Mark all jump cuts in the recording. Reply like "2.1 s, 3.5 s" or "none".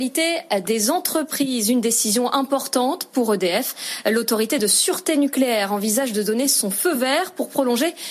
none